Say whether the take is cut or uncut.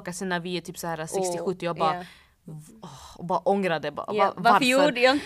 uncut